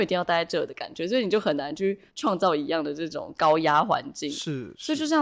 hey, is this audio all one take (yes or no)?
no